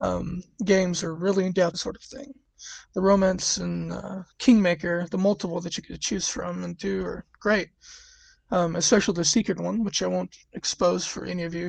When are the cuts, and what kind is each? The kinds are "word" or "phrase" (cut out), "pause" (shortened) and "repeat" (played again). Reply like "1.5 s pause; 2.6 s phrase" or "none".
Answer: 1.7 s phrase; 4.3 s pause; 7.3 s pause